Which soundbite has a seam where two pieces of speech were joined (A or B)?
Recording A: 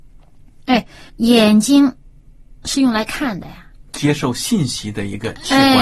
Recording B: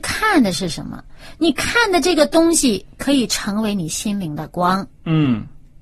A